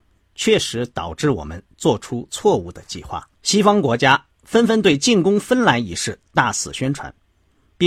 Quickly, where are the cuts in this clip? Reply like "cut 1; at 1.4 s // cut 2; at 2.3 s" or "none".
cut 1; at 3.4 s